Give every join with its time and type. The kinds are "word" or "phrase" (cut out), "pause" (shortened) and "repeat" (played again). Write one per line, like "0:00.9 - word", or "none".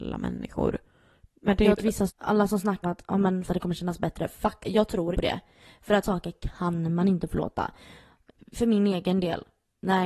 0:01.8 - word
0:02.1 - word
0:02.8 - word
0:03.5 - word
0:04.6 - word
0:05.1 - word
0:06.0 - word

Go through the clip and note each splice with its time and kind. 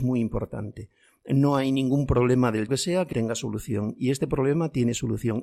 0:02.7 - word
0:03.1 - word

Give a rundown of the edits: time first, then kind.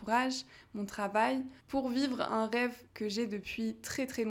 0:01.6 - pause
0:02.9 - pause

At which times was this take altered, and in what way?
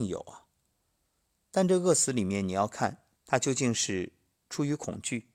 0:03.1 - pause

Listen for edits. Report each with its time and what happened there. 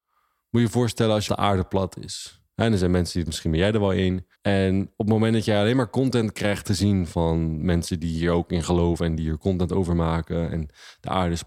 0:01.3 - phrase
0:03.3 - phrase
0:04.3 - pause

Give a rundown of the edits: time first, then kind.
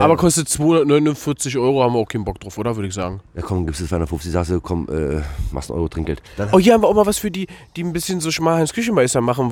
0:06.2 - pause

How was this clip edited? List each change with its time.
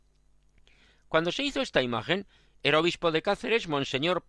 none

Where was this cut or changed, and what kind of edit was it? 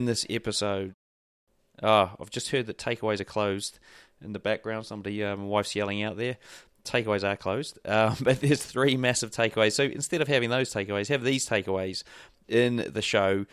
none

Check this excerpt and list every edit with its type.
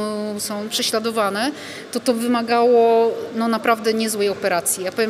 none

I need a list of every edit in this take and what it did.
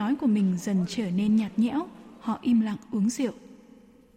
none

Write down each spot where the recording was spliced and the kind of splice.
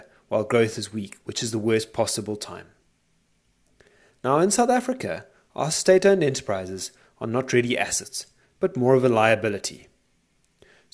none

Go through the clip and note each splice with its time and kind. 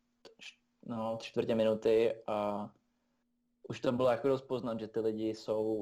none

